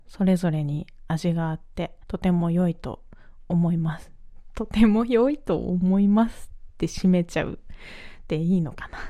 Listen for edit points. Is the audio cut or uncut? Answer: cut